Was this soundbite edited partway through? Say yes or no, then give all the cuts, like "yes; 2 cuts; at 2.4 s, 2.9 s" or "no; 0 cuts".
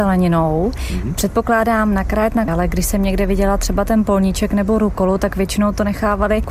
yes; 1 cut; at 2.5 s